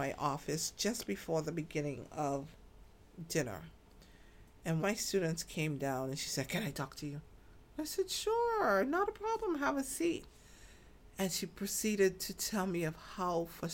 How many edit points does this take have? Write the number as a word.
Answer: one